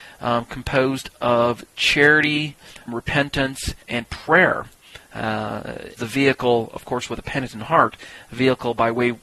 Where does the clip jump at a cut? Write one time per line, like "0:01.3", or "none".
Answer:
0:02.9
0:03.8
0:06.0